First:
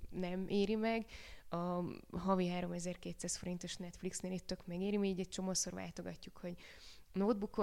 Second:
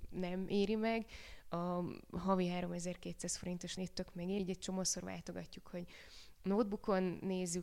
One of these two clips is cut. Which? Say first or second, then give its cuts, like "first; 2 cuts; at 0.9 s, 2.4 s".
second; 2 cuts; at 3.8 s, 4.4 s